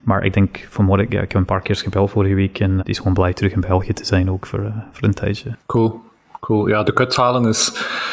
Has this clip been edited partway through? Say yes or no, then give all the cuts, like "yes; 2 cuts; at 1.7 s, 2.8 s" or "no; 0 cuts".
yes; 2 cuts; at 2.8 s, 6.8 s